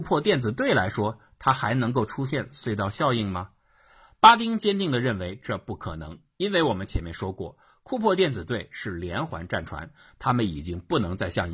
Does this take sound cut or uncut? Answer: uncut